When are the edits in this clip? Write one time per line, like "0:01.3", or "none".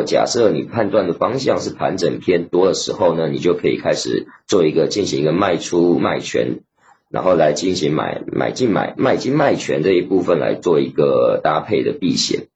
none